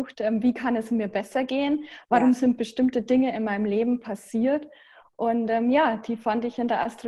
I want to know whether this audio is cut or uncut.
uncut